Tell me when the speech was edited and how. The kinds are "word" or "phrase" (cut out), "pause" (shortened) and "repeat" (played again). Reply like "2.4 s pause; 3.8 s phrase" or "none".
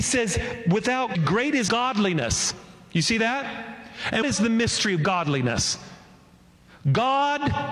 1.1 s word; 1.7 s phrase; 4.2 s word